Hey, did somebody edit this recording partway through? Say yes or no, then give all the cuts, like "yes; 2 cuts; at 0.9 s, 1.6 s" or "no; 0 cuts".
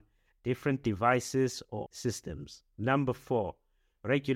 yes; 1 cut; at 1.9 s